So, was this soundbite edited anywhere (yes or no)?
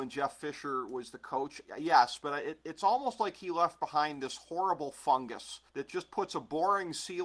yes